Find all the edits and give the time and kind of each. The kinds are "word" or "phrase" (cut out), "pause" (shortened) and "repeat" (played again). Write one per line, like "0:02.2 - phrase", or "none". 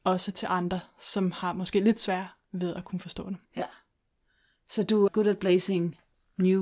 0:03.5 - pause
0:05.1 - word